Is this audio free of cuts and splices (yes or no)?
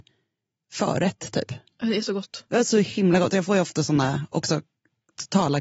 yes